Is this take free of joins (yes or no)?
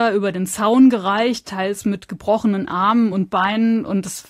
yes